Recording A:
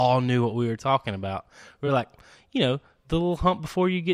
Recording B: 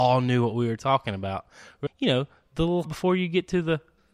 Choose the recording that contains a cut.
B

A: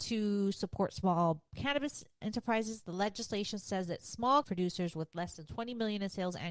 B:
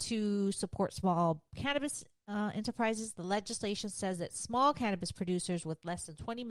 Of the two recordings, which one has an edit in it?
A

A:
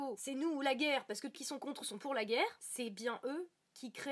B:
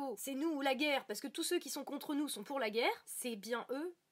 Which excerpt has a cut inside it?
A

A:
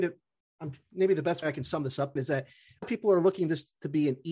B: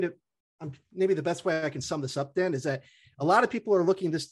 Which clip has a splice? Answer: A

